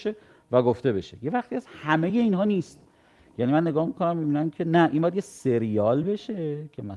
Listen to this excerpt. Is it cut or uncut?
uncut